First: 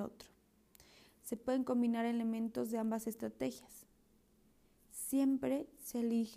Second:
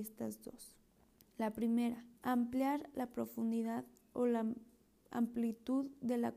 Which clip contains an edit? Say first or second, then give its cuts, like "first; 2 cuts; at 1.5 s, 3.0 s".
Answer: second; 2 cuts; at 0.9 s, 2.2 s